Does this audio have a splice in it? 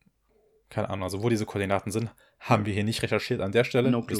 no; 0 cuts

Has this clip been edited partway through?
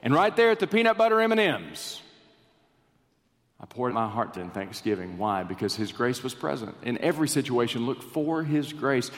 yes; 2 cuts; at 3.9 s, 4.3 s

